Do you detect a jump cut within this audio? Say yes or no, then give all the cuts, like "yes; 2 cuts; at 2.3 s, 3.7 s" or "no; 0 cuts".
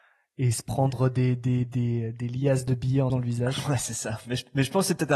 yes; 1 cut; at 3.1 s